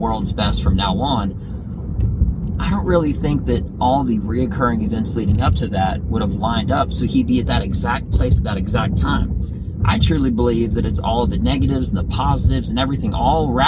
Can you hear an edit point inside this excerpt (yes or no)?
no